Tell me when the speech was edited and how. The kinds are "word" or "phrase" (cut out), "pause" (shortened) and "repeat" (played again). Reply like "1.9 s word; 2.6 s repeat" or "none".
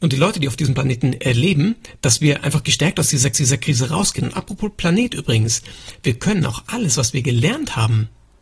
3.3 s repeat

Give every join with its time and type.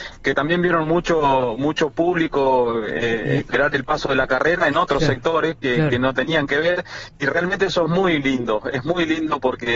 none

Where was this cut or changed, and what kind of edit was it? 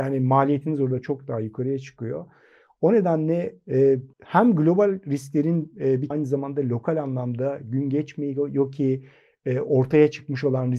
4.1 s pause; 6.1 s phrase

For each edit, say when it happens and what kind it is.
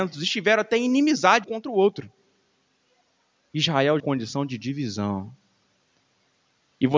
1.4 s word; 4.0 s phrase

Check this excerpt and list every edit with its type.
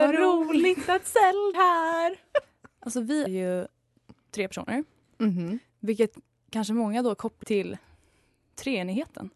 1.5 s word; 3.3 s word; 7.4 s word

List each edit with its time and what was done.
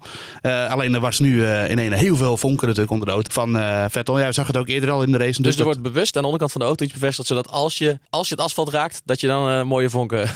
3.3 s word; 8.1 s pause

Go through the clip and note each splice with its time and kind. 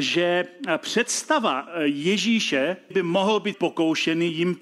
2.9 s word; 3.5 s word

